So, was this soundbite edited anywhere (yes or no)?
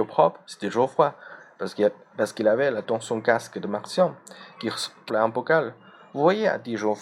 yes